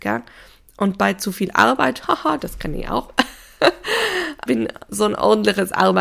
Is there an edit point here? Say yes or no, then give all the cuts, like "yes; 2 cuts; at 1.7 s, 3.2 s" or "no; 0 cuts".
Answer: yes; 1 cut; at 4.5 s